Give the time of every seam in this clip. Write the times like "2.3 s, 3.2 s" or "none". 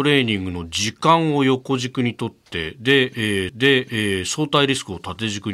3.5 s